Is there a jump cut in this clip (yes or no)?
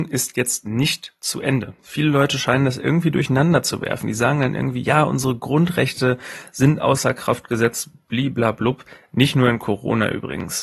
no